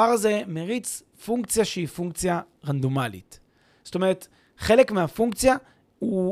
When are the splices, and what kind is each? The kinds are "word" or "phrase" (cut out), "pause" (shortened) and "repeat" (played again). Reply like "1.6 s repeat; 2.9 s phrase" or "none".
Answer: none